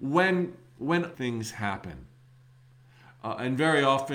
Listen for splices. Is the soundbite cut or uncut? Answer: cut